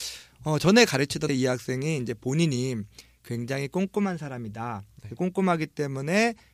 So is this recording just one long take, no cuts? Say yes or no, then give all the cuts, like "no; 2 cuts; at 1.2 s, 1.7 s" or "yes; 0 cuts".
no; 1 cut; at 1.3 s